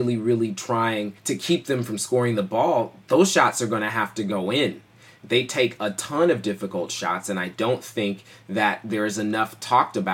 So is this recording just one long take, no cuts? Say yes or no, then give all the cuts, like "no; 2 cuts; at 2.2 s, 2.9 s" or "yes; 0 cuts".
no; 1 cut; at 1.2 s